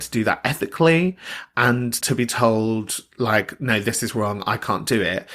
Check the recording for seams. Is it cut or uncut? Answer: cut